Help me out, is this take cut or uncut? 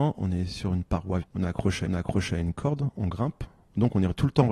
cut